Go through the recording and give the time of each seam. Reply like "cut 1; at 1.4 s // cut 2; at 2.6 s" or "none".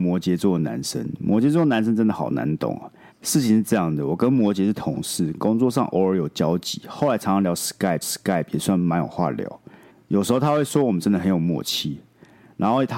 cut 1; at 3.1 s // cut 2; at 8.0 s // cut 3; at 9.9 s